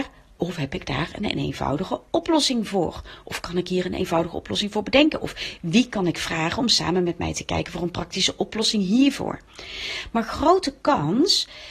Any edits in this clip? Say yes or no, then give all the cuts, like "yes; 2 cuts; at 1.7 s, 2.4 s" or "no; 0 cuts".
no; 0 cuts